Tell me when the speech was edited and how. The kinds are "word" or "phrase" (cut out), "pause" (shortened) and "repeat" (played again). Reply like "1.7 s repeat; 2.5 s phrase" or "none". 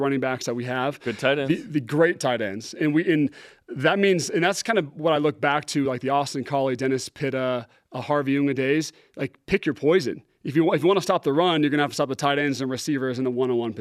none